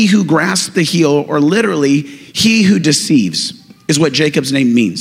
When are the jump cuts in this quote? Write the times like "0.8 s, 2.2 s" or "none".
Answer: none

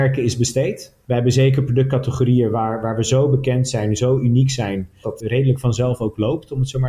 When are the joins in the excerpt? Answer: 5.0 s

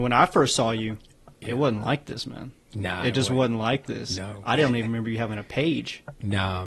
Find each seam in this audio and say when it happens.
1.3 s

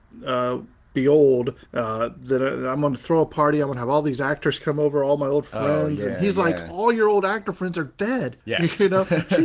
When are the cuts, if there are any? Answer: 1.7 s, 8.4 s

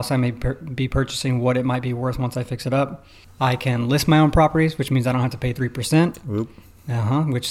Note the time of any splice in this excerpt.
none

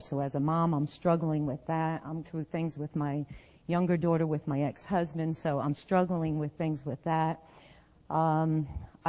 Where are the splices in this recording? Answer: 2.2 s

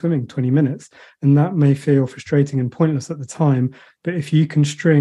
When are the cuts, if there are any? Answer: none

